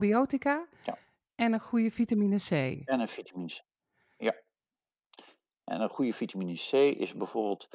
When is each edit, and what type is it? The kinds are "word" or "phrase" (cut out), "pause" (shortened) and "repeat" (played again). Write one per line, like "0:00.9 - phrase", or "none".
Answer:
none